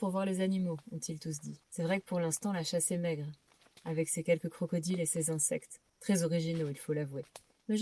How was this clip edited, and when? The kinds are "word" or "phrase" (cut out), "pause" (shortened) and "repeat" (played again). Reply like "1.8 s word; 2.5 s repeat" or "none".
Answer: 1.6 s pause; 5.9 s pause